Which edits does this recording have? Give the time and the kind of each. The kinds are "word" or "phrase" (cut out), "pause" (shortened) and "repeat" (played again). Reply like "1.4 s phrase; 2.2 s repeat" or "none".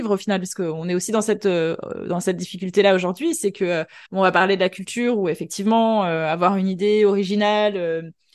4.1 s pause

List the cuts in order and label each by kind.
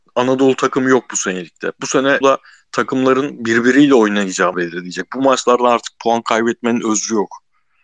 2.2 s word; 4.5 s word

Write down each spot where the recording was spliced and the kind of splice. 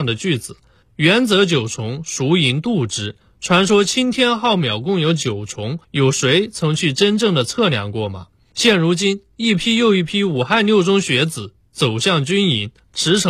3.2 s pause; 5.8 s pause

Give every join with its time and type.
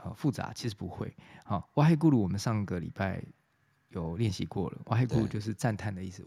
none

